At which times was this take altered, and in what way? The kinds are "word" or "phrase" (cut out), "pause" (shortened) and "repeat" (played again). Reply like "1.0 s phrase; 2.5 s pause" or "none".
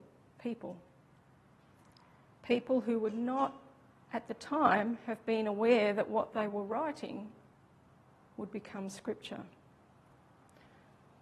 none